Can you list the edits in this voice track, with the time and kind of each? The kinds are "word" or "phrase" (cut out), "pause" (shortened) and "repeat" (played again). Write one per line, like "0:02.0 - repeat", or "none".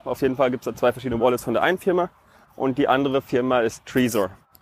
none

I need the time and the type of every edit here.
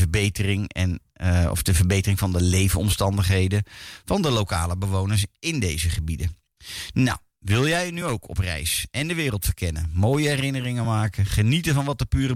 none

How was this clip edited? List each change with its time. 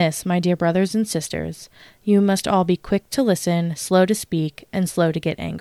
none

